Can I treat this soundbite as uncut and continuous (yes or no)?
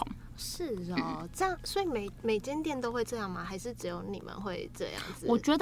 yes